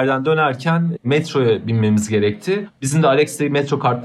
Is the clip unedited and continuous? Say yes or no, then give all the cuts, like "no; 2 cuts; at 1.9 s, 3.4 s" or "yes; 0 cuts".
yes; 0 cuts